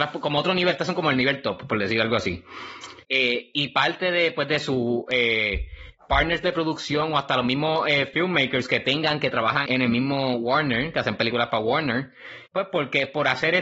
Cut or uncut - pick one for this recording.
cut